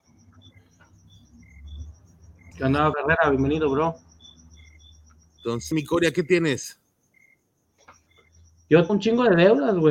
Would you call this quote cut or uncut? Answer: cut